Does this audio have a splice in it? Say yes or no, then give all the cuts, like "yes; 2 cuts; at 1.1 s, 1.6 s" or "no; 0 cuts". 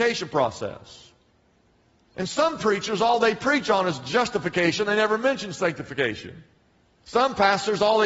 no; 0 cuts